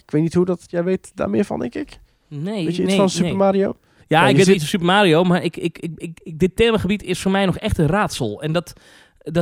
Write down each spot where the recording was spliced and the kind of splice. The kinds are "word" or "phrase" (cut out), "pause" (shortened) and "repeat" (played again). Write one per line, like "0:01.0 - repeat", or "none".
0:04.0 - pause